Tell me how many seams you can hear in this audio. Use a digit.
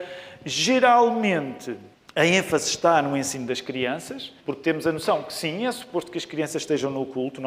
2